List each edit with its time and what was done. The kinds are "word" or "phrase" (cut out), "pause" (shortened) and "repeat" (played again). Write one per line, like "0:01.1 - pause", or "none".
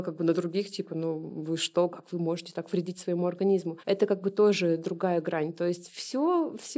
0:03.8 - pause